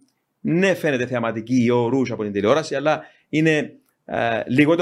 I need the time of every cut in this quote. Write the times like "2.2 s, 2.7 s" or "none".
none